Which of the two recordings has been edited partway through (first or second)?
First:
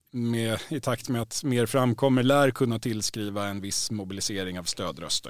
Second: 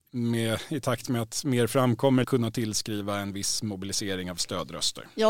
second